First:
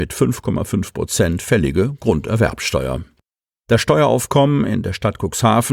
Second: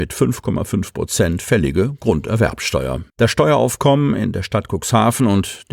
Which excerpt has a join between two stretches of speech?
second; 1 cut; at 3.1 s

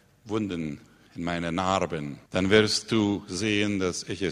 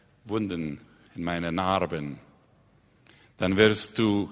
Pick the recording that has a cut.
first; 1 cut; at 2.3 s

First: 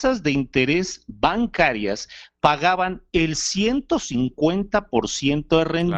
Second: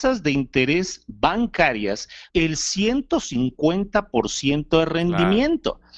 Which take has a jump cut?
second; 1 cut; at 2.3 s

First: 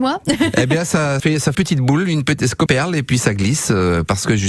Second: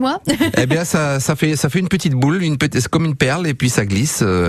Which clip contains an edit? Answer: first; 3 cuts; at 1.2 s, 1.5 s, 2.7 s

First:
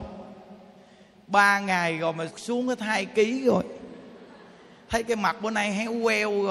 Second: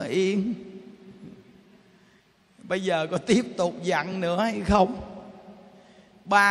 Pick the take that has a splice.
first; 1 cut; at 2.3 s

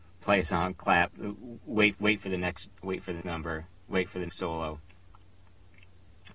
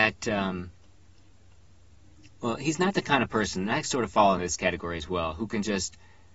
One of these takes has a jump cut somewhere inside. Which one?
first; 4 cuts; at 1.9 s, 2.8 s, 3.2 s, 4.3 s

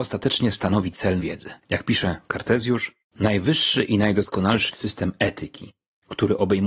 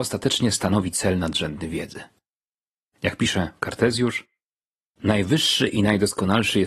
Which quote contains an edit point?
first; 4 cuts; at 1.2 s, 1.6 s, 3.0 s, 4.7 s

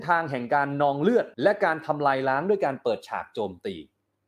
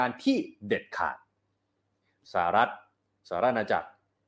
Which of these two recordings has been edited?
first; 1 cut; at 1.3 s

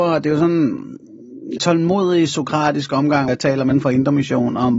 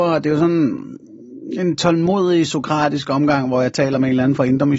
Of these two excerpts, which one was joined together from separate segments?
first; 3 cuts; at 1.6 s, 3.3 s, 3.7 s

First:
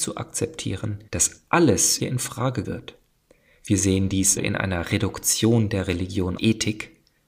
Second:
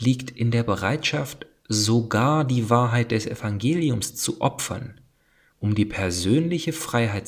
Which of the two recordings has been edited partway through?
first; 6 cuts; at 1.1 s, 2.0 s, 2.6 s, 3.1 s, 4.4 s, 6.4 s

